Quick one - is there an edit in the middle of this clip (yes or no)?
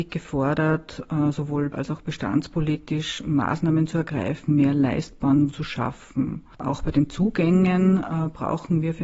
yes